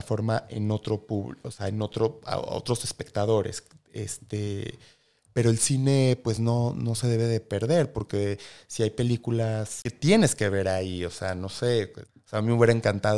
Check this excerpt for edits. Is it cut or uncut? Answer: uncut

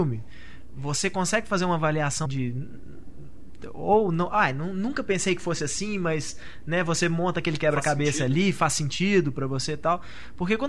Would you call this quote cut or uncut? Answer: cut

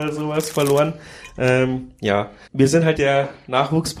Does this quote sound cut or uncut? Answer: cut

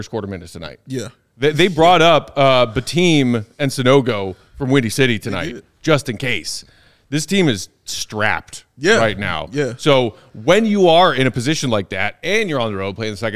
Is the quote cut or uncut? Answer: uncut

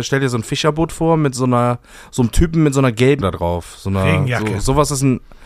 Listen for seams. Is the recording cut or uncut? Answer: cut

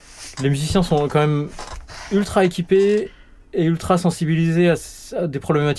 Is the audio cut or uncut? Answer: uncut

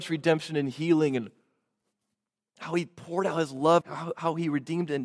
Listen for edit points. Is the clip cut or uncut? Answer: cut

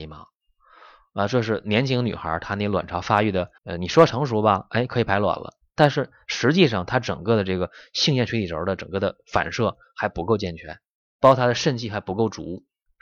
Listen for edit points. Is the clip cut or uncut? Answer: cut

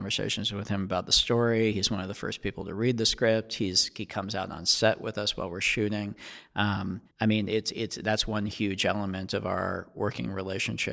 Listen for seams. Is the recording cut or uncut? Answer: cut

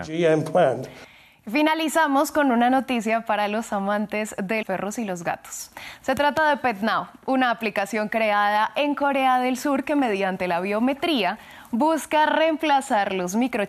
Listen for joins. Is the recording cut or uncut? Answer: cut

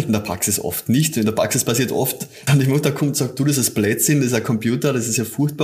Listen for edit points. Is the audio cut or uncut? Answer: cut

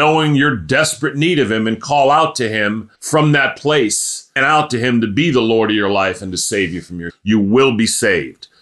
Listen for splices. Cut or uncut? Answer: cut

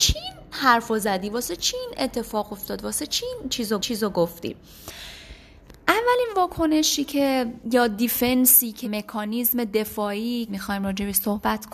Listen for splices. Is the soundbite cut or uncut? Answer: cut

